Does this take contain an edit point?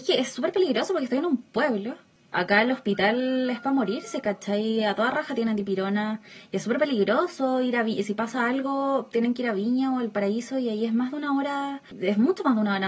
no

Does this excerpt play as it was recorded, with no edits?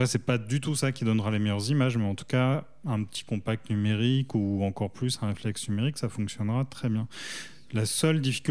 yes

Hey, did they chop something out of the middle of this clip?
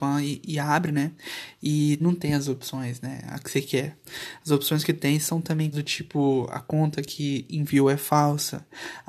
yes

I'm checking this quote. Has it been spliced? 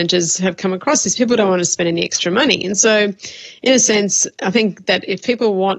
no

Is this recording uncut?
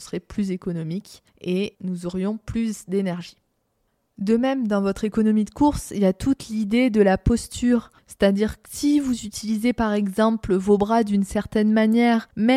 no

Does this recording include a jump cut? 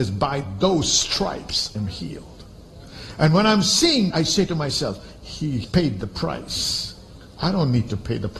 yes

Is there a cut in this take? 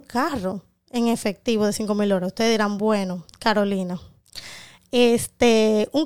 no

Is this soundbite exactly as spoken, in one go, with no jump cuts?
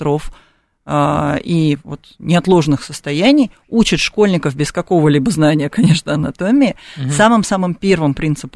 yes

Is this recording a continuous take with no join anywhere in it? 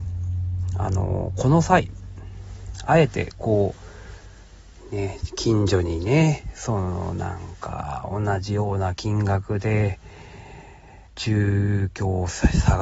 no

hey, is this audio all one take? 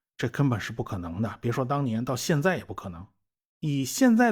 yes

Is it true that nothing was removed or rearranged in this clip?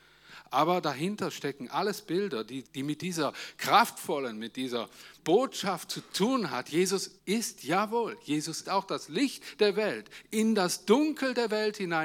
no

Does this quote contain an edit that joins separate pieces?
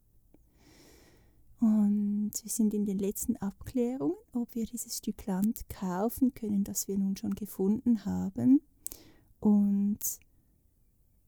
no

